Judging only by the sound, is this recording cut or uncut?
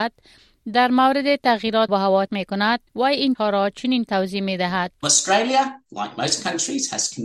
cut